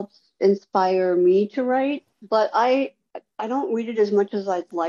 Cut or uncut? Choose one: uncut